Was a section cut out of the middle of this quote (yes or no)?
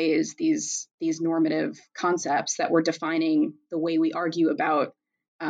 no